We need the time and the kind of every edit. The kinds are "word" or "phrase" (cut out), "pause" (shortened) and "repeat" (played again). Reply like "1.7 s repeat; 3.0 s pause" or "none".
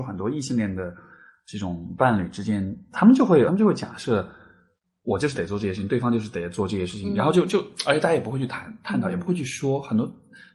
3.5 s word

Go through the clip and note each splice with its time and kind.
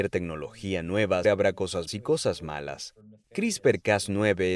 1.2 s word; 1.9 s word

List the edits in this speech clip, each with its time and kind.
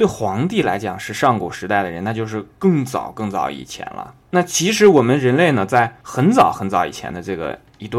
4.2 s pause; 6.0 s pause

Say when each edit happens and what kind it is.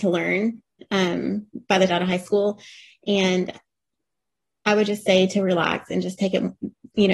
1.9 s phrase

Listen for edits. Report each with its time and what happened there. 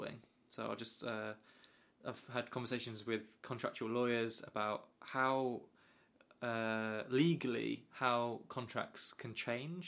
none

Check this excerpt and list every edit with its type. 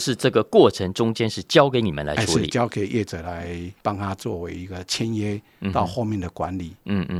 3.8 s pause

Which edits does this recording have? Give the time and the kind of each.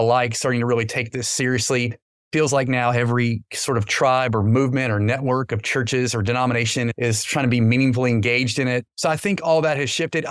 none

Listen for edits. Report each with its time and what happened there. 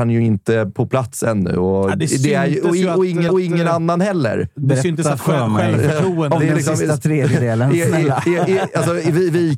3.3 s repeat

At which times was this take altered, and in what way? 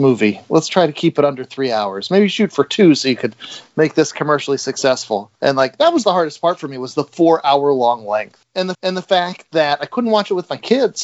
5.3 s pause; 6.0 s word; 8.7 s repeat

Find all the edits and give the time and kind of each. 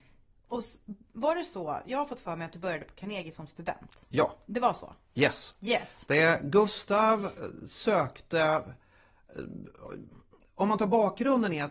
none

